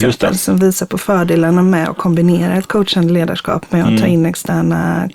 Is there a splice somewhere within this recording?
no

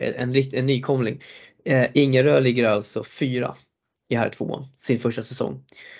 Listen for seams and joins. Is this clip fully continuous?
yes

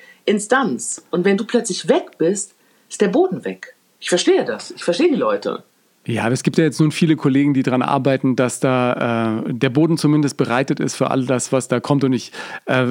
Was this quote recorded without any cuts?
yes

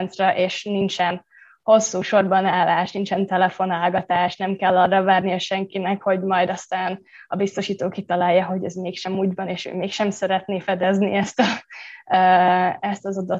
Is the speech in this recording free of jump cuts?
yes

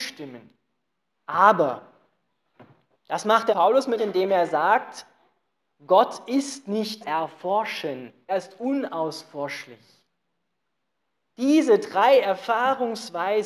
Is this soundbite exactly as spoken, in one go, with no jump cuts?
no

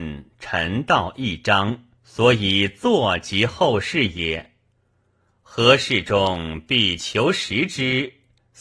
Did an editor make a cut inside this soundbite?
yes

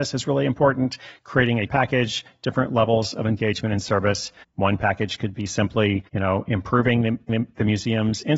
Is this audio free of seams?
no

